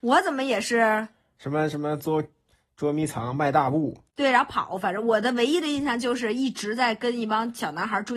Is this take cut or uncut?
uncut